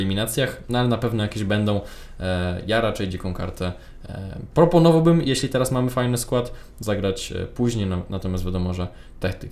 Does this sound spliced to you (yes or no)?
no